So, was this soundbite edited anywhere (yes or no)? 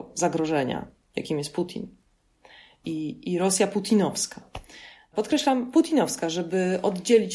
no